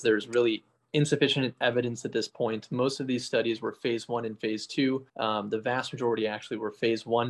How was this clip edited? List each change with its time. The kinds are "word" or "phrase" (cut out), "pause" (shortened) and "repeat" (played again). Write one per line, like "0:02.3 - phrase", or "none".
0:05.1 - pause